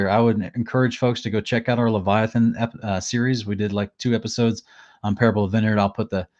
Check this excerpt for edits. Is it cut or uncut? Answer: uncut